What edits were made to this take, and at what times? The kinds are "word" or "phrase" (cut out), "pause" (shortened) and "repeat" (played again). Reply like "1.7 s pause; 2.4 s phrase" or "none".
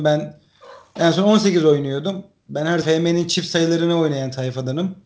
2.8 s word